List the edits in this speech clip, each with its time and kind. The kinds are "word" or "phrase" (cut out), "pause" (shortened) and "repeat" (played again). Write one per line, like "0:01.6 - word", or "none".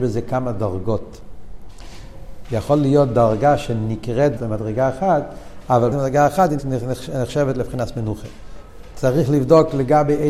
0:04.4 - phrase
0:05.9 - word
0:06.6 - word